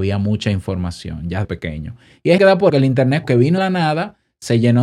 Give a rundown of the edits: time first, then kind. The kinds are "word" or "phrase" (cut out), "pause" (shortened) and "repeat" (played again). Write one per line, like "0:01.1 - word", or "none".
0:01.4 - word
0:02.4 - word
0:02.7 - word
0:03.2 - word
0:03.6 - word